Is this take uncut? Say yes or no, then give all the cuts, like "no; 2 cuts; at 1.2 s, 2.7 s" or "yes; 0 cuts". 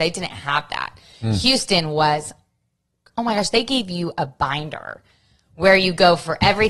yes; 0 cuts